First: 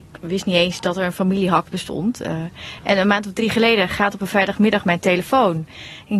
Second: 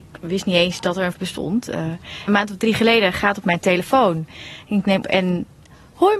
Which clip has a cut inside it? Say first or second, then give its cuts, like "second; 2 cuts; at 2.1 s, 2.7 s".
second; 4 cuts; at 1.1 s, 2.3 s, 3.4 s, 5.0 s